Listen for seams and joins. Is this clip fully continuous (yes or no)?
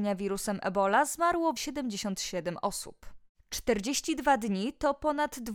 no